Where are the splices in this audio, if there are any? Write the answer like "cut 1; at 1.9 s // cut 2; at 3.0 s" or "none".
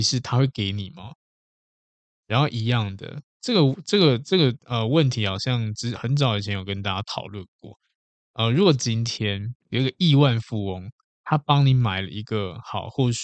cut 1; at 9.6 s // cut 2; at 11.1 s